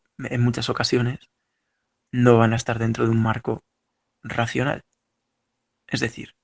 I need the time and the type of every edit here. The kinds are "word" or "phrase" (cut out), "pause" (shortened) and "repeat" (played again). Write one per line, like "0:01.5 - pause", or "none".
none